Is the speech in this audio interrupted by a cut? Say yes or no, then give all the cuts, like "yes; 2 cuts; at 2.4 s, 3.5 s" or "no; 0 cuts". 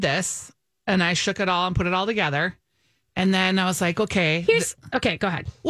no; 0 cuts